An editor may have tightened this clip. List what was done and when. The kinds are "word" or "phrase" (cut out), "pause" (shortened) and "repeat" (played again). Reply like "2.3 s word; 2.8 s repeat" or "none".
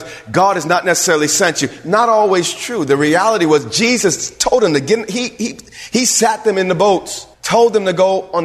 7.3 s pause